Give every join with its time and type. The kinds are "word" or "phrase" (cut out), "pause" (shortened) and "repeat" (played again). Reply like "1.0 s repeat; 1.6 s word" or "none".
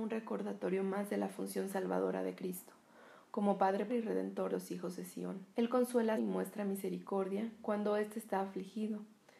3.9 s word; 4.5 s word; 5.5 s pause; 6.2 s phrase